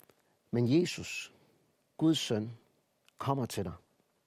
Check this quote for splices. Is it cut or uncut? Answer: uncut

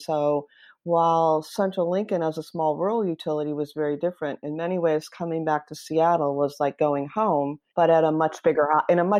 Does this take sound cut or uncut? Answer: cut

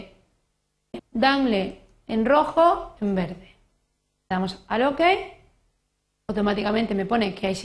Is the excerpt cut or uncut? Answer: cut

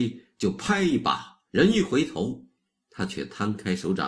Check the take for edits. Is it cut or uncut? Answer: cut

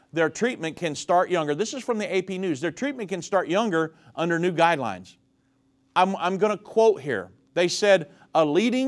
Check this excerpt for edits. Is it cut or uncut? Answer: uncut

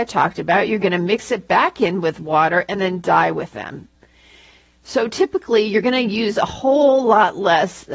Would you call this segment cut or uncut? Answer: uncut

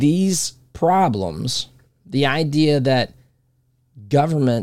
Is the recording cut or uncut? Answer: uncut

